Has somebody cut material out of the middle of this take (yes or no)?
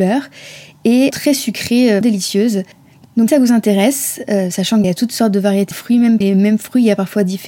yes